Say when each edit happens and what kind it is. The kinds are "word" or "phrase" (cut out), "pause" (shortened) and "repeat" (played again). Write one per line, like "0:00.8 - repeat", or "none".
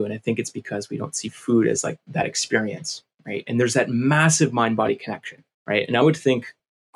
0:05.5 - pause